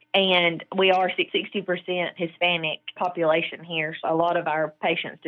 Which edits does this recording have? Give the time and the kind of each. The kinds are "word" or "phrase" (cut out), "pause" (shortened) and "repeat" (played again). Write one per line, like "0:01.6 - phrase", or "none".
0:01.3 - word
0:02.2 - word
0:03.0 - word
0:04.0 - word

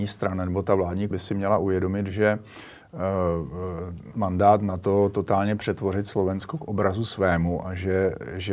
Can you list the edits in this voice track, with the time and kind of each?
0:01.1 - word
0:04.1 - word

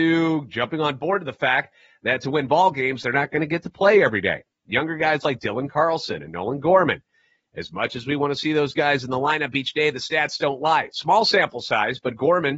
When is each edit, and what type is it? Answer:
none

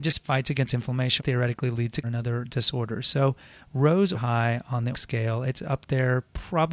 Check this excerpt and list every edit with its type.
0:01.2 - phrase
0:02.0 - word
0:04.1 - phrase
0:04.9 - word

